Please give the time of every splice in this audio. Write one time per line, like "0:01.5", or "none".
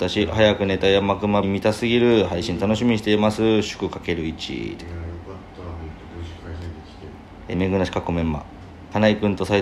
0:01.4
0:07.5